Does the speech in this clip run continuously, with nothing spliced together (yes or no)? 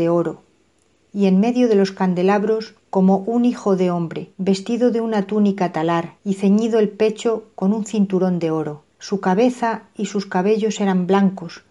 no